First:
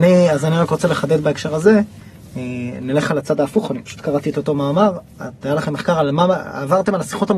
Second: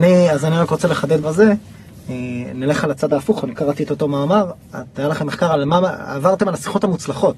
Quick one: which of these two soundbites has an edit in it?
second; 2 cuts; at 1.2 s, 3.6 s

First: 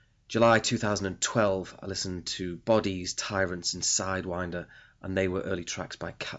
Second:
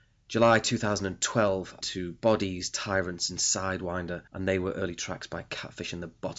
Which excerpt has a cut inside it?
second; 2 cuts; at 1.8 s, 4.3 s

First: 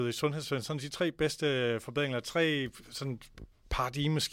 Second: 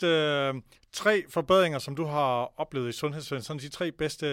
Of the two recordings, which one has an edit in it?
first; 1 cut; at 2.8 s

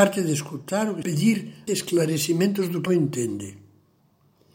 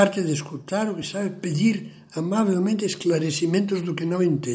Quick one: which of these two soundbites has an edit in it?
first; 3 cuts; at 1.0 s, 1.7 s, 2.9 s

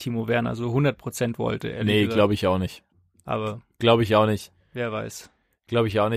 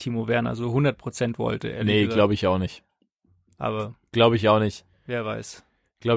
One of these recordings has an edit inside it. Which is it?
first; 1 cut; at 2.9 s

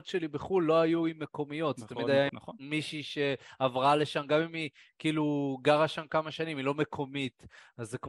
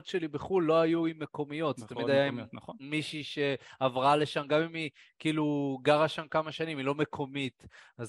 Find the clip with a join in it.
first; 1 cut; at 2.3 s

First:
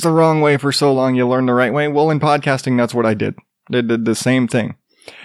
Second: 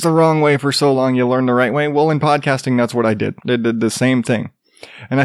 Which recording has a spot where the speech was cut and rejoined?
second; 1 cut; at 3.4 s

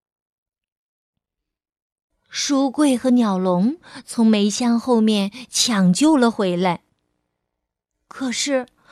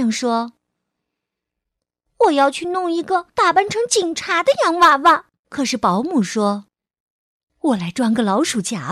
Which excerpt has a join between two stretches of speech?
second; 3 cuts; at 3.3 s, 5.4 s, 6.7 s

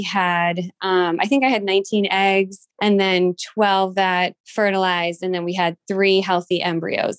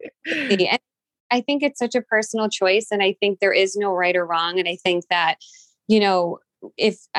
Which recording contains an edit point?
first; 2 cuts; at 2.7 s, 4.4 s

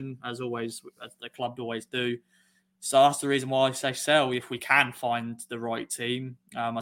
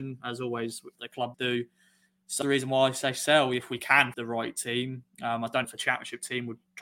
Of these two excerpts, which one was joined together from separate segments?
second; 5 cuts; at 0.9 s, 1.3 s, 2.4 s, 4.1 s, 5.6 s

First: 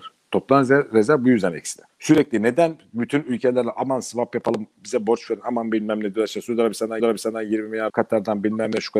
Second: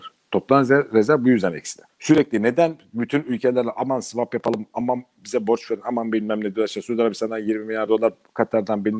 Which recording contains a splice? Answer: first; 3 cuts; at 4.7 s, 7.0 s, 7.9 s

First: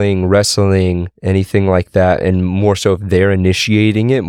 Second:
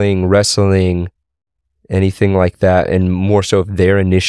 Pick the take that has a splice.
first; 1 cut; at 1.1 s

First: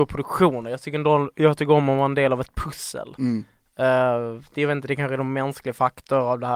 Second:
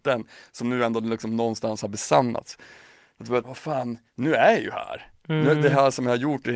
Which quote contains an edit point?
second; 2 cuts; at 3.4 s, 4.1 s

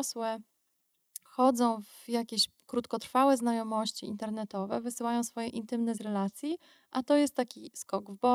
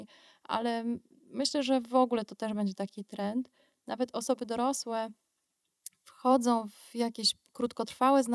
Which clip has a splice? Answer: first; 2 cuts; at 1.3 s, 6.0 s

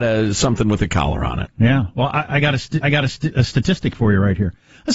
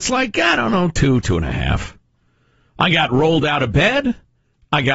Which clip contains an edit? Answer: first; 1 cut; at 2.8 s

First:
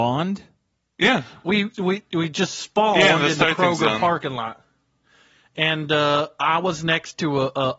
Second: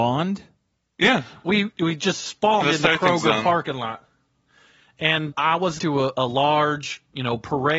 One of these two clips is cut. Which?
second; 5 cuts; at 1.7 s, 2.6 s, 5.3 s, 5.8 s, 6.1 s

